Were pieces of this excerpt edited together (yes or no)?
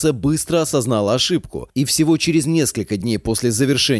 no